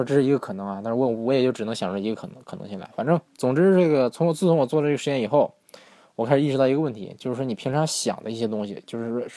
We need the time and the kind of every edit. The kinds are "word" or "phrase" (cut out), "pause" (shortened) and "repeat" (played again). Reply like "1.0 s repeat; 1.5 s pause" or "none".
none